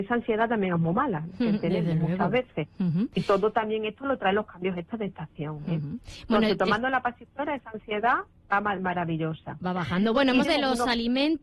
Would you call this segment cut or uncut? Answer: cut